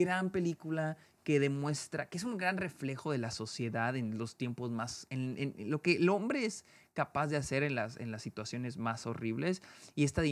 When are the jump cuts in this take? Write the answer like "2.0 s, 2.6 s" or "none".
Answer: none